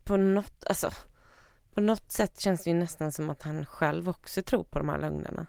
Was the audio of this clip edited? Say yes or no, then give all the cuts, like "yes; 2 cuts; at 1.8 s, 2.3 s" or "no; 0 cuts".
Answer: no; 0 cuts